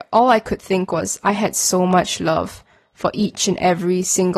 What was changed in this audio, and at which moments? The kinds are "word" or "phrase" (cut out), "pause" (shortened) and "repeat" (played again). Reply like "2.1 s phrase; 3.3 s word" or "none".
none